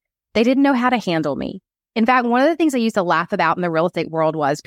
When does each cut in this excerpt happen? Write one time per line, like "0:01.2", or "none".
none